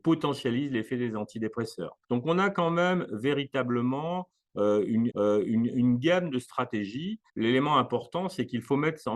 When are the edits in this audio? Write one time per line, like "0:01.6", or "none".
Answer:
0:02.0
0:05.1
0:07.3